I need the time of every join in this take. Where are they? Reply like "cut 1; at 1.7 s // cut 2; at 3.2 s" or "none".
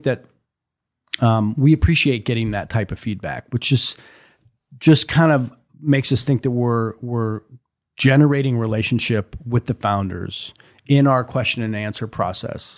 none